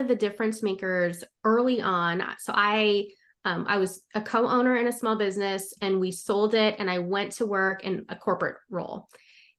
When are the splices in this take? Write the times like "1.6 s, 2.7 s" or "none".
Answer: none